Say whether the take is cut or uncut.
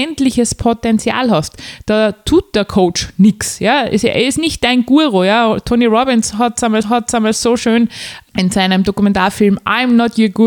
cut